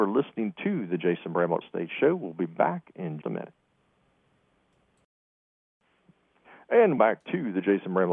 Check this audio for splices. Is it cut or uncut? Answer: cut